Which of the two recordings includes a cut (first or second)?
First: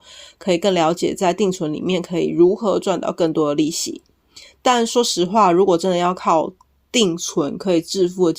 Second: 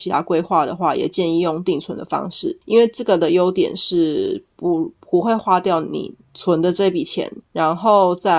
second